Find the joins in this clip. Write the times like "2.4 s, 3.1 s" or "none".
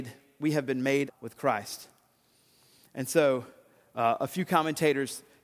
1.1 s